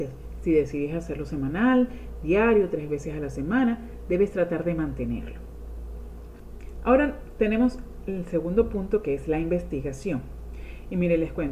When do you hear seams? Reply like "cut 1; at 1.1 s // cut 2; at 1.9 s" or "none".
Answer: none